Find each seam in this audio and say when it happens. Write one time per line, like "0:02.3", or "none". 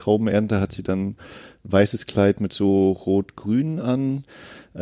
none